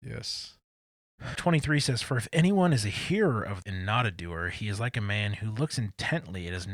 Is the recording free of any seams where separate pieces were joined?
no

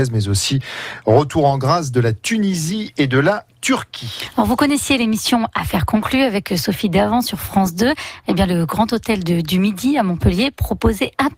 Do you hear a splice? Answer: no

